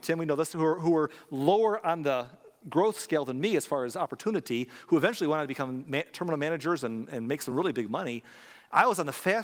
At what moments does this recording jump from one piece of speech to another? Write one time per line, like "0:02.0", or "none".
none

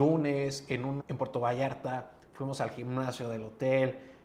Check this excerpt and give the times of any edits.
0:01.0

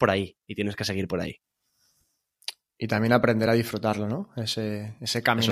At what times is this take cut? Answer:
none

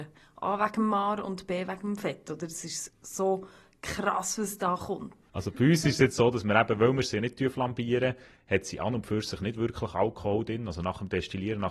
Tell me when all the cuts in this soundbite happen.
none

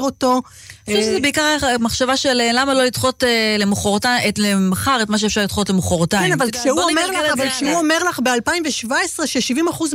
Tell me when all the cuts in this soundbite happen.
none

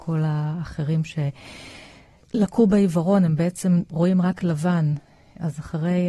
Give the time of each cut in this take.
none

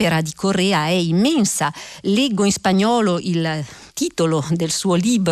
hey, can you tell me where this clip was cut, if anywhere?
0:03.9

